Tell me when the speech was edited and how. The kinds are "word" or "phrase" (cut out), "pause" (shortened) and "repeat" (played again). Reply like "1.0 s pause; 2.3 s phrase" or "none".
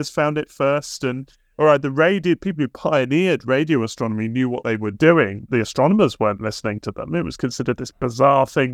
5.5 s word